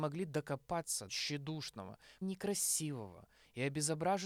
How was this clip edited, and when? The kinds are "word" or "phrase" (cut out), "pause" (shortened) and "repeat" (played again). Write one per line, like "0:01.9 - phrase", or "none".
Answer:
0:01.1 - word
0:02.2 - word